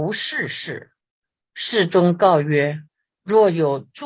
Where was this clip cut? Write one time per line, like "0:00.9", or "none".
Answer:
0:01.0
0:02.9

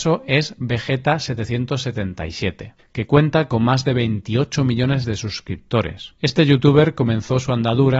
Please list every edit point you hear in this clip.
0:02.8
0:06.2

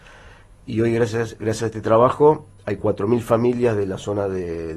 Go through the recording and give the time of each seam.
0:01.4

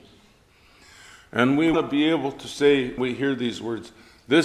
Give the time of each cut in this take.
0:01.7
0:03.0

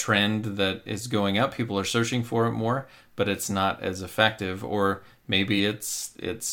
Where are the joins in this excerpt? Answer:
none

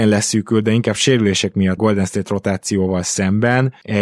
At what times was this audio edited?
0:01.8

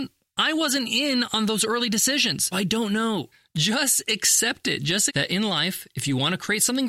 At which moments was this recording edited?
0:02.5
0:05.1

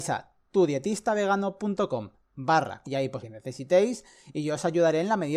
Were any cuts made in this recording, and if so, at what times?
0:02.8
0:03.2

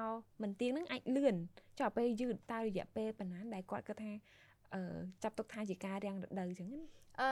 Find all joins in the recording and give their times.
none

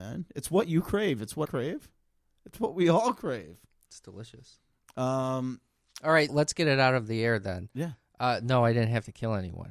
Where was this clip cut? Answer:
0:01.4
0:06.3

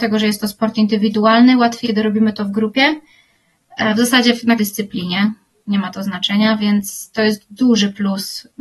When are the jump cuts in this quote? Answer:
0:01.8
0:04.6

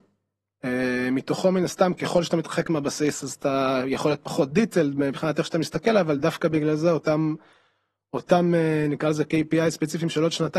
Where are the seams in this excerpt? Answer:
none

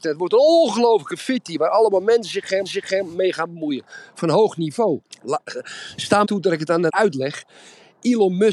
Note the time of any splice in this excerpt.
0:02.7
0:05.1
0:06.2
0:06.9

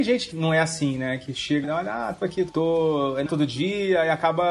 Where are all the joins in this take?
0:01.6
0:02.1
0:02.5
0:03.3

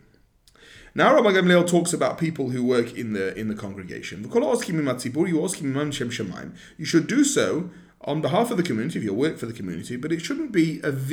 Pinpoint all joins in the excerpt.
none

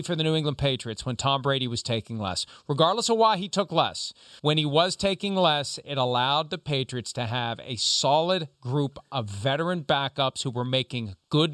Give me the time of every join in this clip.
0:04.4

